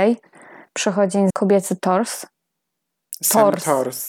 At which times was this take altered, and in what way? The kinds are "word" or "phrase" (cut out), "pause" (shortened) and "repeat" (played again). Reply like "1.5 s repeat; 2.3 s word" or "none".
1.3 s word